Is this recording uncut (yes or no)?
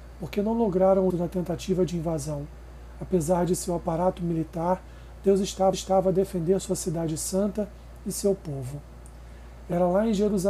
no